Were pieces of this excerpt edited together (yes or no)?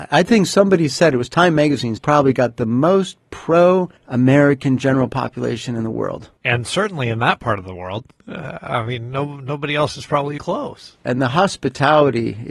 yes